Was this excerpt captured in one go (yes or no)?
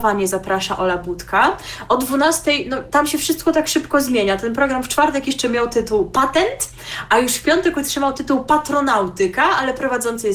yes